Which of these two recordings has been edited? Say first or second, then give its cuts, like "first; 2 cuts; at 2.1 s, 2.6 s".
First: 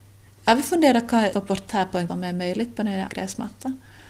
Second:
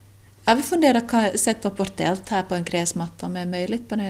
first; 4 cuts; at 1.3 s, 1.7 s, 2.1 s, 3.1 s